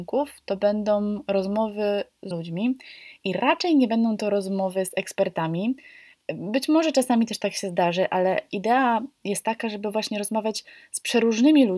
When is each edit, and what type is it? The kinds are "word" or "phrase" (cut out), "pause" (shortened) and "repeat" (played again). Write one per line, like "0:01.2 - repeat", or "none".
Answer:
0:02.3 - word